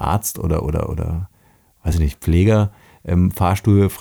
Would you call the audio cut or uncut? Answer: uncut